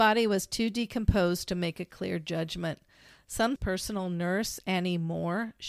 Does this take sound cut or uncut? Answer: cut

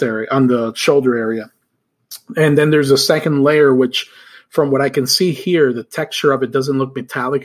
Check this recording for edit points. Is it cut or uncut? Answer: uncut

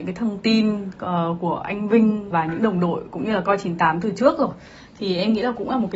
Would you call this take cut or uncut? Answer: cut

